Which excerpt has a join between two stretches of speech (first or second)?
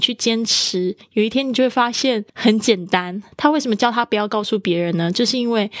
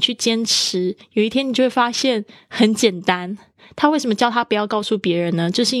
first